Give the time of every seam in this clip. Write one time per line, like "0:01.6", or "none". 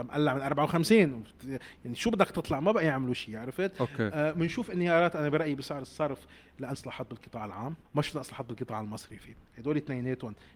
0:06.7
0:07.8